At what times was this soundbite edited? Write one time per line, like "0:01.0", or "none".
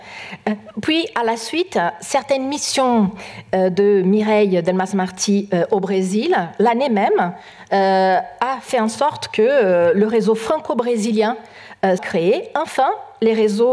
0:12.0